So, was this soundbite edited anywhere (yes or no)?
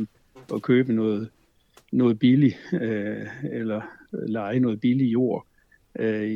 no